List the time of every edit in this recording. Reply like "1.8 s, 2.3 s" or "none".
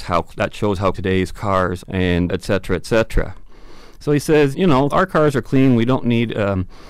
0.9 s, 1.8 s, 2.3 s, 4.5 s, 4.9 s